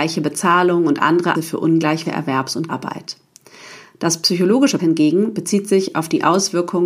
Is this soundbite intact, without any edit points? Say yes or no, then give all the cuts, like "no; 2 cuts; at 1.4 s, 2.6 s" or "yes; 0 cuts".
no; 4 cuts; at 1.3 s, 2.0 s, 2.7 s, 4.8 s